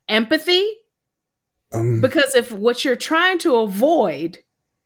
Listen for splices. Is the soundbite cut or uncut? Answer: uncut